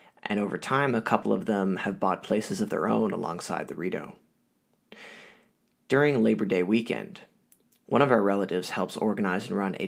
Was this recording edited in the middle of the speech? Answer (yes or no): no